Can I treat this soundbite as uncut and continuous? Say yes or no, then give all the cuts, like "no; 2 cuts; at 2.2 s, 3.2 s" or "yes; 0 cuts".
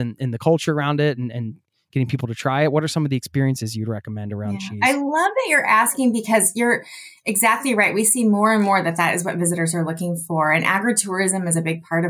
yes; 0 cuts